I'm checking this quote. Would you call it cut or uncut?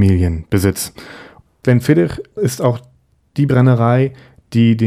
uncut